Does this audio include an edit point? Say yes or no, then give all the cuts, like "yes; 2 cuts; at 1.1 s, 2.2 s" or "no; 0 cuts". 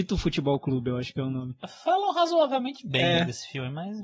no; 0 cuts